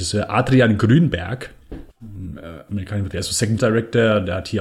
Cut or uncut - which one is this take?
cut